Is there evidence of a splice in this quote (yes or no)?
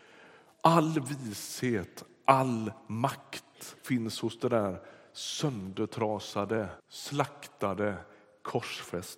yes